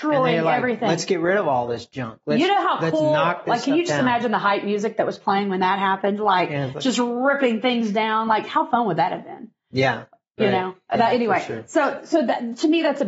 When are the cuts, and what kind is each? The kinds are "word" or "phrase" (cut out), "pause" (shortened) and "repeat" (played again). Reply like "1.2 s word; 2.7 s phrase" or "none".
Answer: none